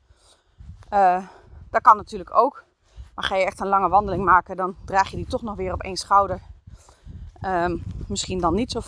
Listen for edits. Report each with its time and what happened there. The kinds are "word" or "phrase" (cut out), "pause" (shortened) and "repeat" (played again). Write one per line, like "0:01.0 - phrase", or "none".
none